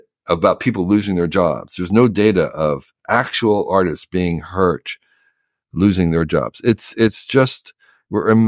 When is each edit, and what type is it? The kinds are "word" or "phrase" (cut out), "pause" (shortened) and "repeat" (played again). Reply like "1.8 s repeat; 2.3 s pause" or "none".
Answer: none